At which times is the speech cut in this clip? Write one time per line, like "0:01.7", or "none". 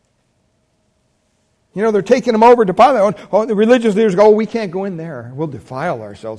none